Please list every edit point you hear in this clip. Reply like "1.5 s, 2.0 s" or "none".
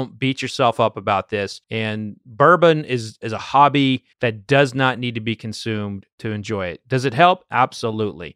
1.6 s, 4.1 s